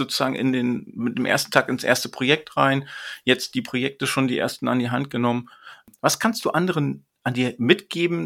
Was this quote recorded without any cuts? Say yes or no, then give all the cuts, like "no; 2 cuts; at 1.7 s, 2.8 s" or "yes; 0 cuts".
yes; 0 cuts